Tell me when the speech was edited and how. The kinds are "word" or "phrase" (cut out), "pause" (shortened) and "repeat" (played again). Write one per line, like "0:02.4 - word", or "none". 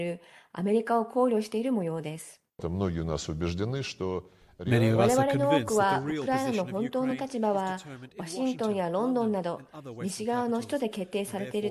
none